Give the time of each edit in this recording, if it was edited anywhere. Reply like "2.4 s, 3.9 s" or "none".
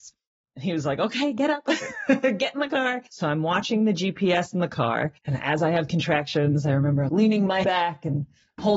3.1 s, 5.2 s, 7.1 s, 7.6 s